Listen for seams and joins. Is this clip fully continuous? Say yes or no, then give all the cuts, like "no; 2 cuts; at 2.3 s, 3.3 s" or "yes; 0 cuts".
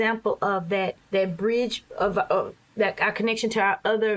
no; 2 cuts; at 1.0 s, 1.9 s